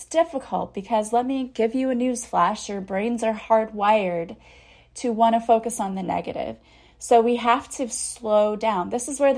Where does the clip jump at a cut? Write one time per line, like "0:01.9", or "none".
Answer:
none